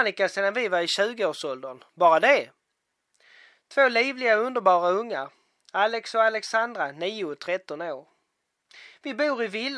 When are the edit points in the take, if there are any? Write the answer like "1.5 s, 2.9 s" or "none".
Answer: none